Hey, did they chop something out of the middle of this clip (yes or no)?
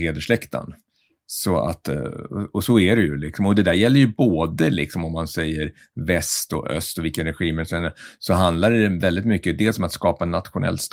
no